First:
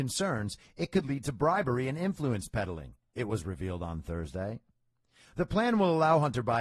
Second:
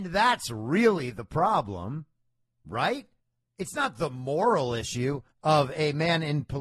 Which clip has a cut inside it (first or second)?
second